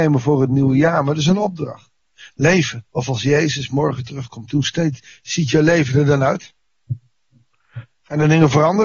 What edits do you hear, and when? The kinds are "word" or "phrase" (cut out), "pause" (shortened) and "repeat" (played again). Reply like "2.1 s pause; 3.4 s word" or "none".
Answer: 2.9 s pause